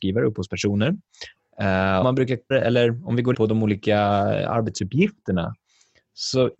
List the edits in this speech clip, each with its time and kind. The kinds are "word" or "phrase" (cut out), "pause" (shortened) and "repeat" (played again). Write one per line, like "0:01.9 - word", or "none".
0:02.0 - word
0:02.5 - word
0:03.3 - word